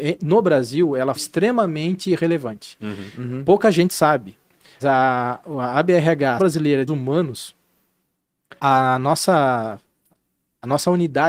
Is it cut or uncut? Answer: cut